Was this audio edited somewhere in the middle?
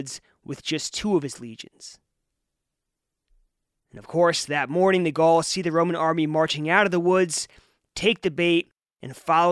no; 0 cuts

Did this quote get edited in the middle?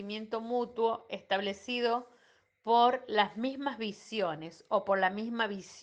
no; 0 cuts

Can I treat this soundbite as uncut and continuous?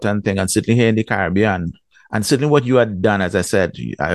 yes; 0 cuts

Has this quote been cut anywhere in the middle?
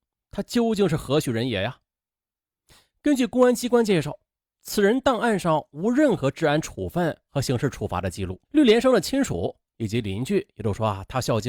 yes; 1 cut; at 8.4 s

